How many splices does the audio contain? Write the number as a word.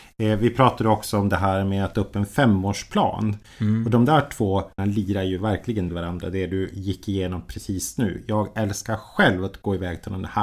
three